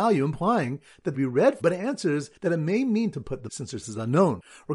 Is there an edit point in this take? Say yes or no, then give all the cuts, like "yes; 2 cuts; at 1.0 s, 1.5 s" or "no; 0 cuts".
yes; 6 cuts; at 1.1 s, 1.6 s, 2.4 s, 3.1 s, 3.5 s, 3.8 s